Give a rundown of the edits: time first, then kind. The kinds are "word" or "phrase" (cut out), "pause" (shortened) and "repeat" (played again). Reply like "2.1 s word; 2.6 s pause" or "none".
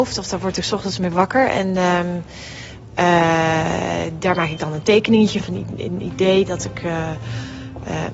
4.2 s word; 5.4 s word